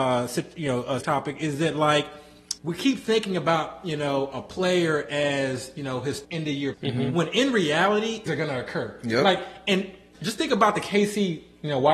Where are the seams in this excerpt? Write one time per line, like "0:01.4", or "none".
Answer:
0:01.0
0:02.6
0:06.2
0:06.7
0:08.3
0:10.1